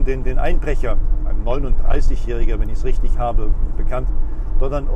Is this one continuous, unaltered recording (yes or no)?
no